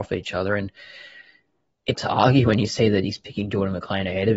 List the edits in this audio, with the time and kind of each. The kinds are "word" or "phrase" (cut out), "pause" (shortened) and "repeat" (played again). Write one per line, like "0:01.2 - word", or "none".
0:01.9 - word